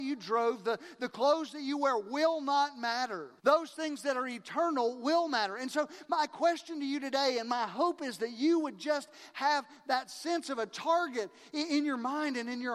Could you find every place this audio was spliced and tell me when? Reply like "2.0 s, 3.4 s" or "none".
3.4 s